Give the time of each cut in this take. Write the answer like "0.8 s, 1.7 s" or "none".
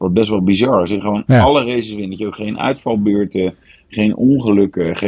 none